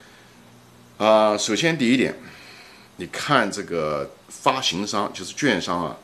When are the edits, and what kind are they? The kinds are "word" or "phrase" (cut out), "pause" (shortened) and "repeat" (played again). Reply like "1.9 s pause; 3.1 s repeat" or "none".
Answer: 2.9 s pause; 4.2 s pause